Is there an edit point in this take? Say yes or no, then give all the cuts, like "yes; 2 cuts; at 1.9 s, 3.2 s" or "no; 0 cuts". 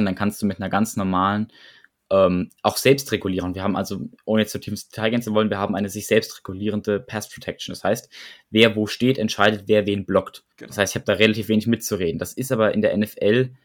yes; 1 cut; at 10.5 s